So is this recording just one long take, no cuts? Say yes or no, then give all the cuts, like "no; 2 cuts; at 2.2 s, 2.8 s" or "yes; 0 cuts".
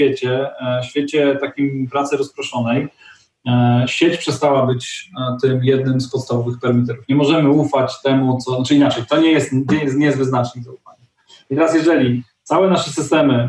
yes; 0 cuts